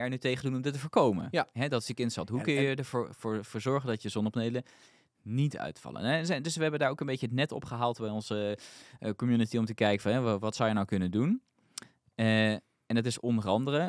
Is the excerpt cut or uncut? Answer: uncut